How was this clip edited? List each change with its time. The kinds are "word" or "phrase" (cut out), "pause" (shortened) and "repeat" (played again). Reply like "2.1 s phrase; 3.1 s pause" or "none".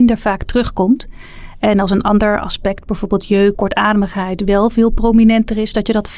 3.5 s word